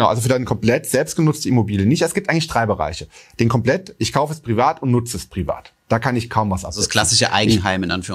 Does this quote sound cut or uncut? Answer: uncut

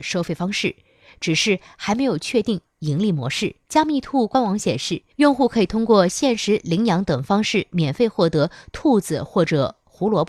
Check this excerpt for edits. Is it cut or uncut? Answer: cut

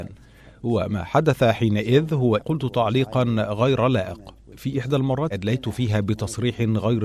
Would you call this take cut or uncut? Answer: cut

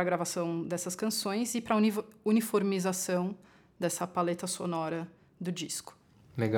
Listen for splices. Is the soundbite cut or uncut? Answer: uncut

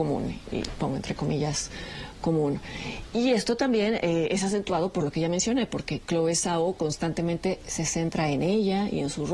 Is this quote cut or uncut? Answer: uncut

